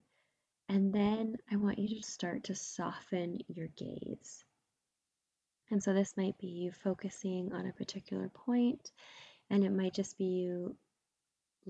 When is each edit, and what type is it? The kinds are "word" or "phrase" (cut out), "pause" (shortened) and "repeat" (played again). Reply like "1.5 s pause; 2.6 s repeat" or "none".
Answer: 2.0 s word